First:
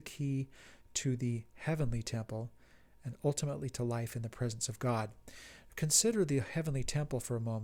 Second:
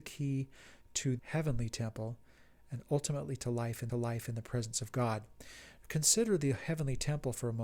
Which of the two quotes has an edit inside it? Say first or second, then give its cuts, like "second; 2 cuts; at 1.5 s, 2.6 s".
second; 2 cuts; at 1.2 s, 3.9 s